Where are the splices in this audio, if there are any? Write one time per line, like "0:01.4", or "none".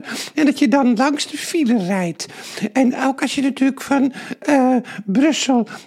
none